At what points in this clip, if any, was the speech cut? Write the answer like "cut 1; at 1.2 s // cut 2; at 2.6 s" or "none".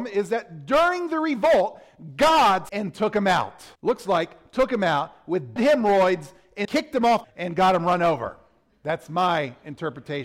cut 1; at 2.7 s // cut 2; at 3.8 s // cut 3; at 5.6 s // cut 4; at 6.6 s // cut 5; at 7.2 s